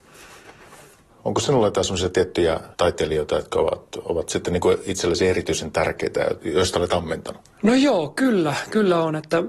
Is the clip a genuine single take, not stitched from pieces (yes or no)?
no